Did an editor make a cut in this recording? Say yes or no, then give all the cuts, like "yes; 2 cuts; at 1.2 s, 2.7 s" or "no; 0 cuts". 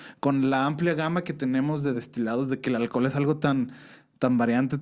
no; 0 cuts